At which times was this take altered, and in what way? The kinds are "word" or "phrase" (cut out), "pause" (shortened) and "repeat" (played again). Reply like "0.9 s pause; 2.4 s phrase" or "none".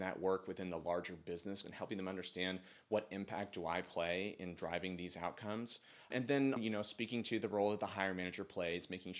1.6 s word; 6.6 s word